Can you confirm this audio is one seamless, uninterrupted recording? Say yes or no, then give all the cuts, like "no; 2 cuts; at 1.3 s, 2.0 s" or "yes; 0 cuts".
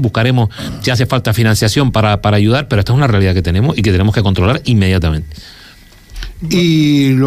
yes; 0 cuts